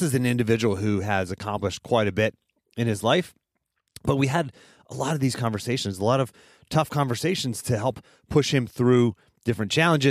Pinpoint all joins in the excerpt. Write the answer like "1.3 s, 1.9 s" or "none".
none